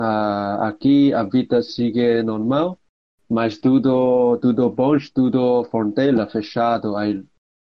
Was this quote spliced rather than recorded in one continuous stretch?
no; 0 cuts

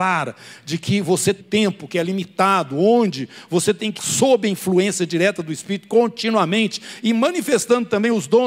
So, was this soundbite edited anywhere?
yes; 2 cuts; at 1.4 s, 4.0 s

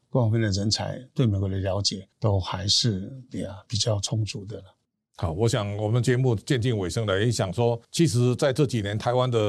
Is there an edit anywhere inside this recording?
yes; 2 cuts; at 2.1 s, 7.8 s

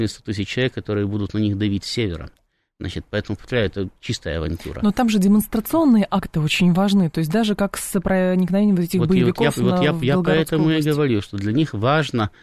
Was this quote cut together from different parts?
no; 0 cuts

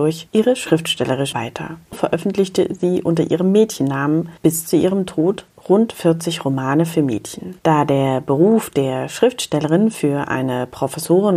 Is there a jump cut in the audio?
yes; 4 cuts; at 1.3 s, 1.9 s, 4.4 s, 7.6 s

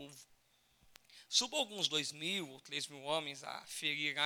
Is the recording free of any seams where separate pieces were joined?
yes; 0 cuts

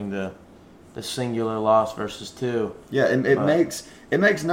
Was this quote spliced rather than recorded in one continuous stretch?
no; 0 cuts

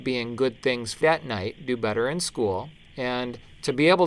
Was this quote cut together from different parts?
yes; 1 cut; at 1.0 s

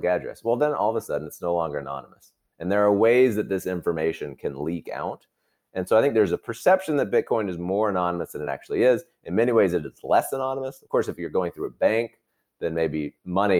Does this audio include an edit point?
no; 0 cuts

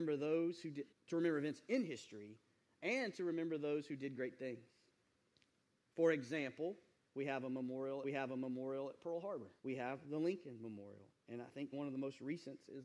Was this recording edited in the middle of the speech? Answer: yes; 6 cuts; at 0.9 s, 7.0 s, 8.0 s, 9.6 s, 11.1 s, 11.7 s

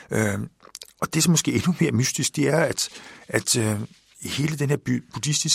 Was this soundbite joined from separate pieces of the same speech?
no; 0 cuts

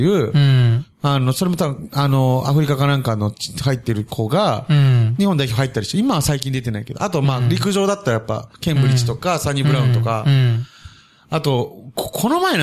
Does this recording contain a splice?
no; 0 cuts

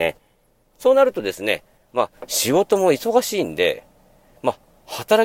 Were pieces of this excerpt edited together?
no; 0 cuts

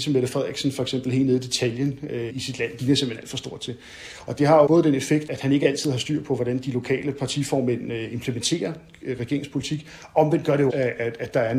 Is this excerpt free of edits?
no; 5 cuts; at 2.3 s, 2.8 s, 4.7 s, 5.3 s, 10.7 s

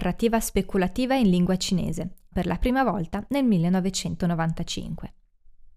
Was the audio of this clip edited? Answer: yes; 1 cut; at 2.3 s

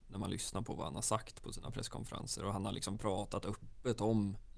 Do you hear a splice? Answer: no; 0 cuts

